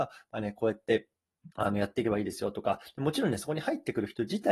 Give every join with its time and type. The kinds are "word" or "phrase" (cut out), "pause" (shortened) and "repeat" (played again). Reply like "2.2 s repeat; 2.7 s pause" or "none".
1.5 s pause